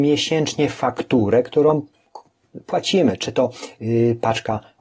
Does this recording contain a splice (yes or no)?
no